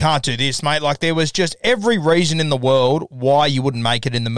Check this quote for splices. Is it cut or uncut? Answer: uncut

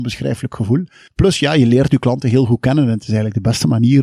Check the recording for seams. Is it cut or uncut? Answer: cut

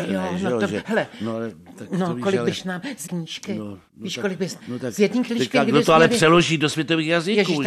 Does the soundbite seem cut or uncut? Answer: cut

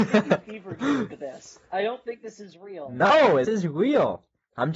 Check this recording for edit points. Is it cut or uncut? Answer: cut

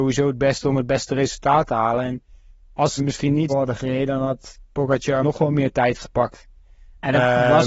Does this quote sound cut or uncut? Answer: cut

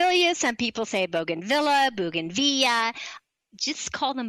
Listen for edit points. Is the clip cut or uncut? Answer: uncut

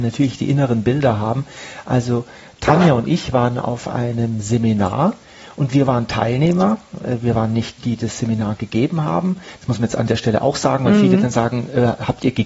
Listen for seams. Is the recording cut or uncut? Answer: cut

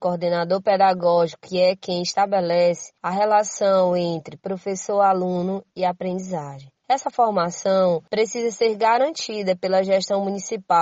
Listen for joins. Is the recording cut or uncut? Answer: cut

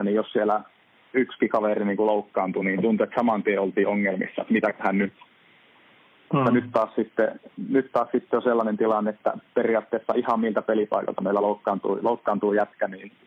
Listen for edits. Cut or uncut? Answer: uncut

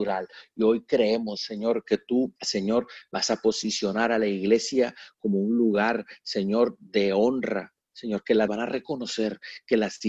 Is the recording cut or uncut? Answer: cut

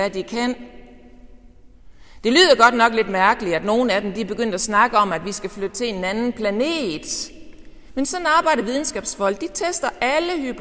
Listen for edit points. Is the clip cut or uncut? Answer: uncut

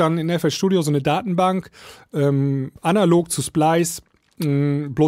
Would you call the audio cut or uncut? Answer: uncut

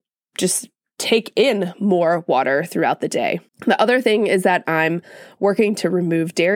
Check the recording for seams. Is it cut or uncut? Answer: cut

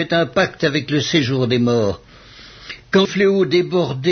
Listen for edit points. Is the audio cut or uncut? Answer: cut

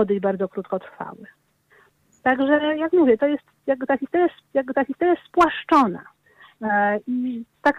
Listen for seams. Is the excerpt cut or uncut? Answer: cut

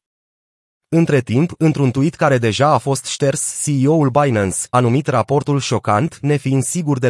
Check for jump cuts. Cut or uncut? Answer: cut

